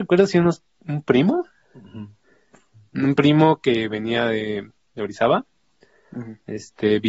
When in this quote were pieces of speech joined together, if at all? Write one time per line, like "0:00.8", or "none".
0:04.8